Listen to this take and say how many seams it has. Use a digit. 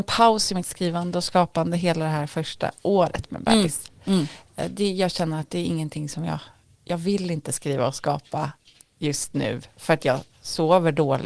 0